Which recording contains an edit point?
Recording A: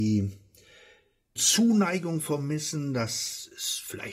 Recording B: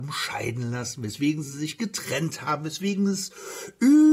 A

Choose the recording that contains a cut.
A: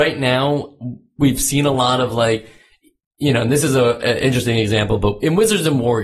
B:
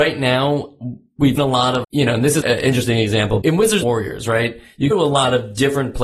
B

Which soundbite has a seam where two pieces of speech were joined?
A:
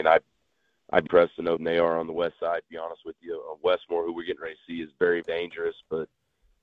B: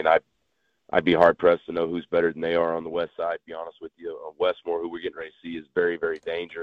A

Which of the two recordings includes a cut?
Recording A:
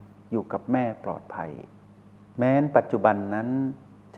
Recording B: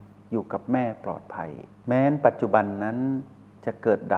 B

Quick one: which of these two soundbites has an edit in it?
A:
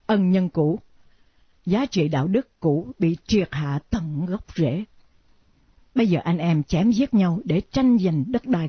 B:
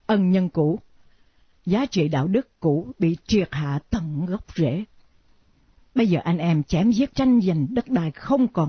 B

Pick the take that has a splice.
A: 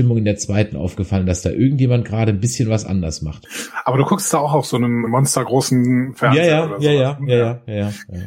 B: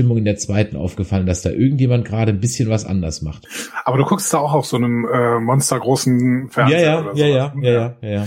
A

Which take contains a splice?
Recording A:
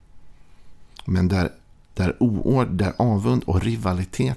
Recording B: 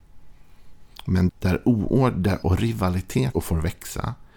B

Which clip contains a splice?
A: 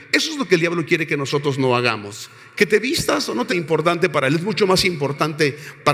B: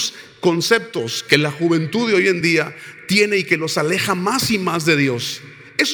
A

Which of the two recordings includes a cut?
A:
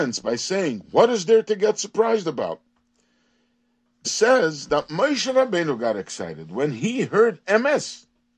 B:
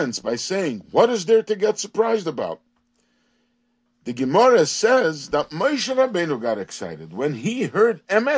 A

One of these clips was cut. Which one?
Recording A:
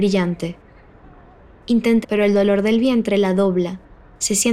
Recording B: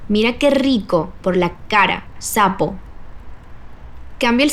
A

